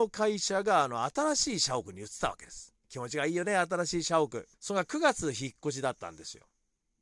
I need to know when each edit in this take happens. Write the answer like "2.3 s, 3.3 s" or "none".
2.8 s, 4.5 s